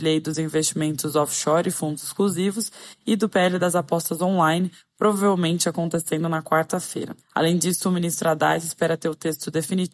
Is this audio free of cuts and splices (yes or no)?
no